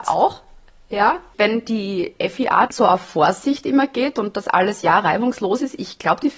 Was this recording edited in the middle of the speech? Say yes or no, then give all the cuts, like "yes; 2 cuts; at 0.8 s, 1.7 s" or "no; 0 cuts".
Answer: no; 0 cuts